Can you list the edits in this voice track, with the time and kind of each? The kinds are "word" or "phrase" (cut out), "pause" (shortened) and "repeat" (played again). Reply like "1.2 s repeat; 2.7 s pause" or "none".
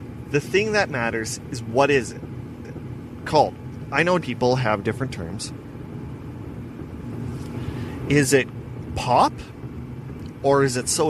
2.6 s repeat; 4.2 s word